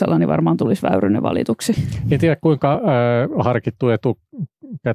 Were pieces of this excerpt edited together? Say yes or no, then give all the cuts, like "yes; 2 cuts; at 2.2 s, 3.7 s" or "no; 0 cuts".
no; 0 cuts